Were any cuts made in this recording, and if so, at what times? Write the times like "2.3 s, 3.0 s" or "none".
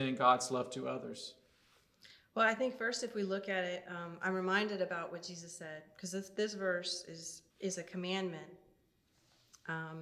7.5 s